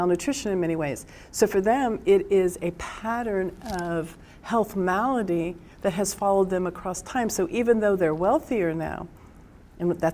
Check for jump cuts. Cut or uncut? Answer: uncut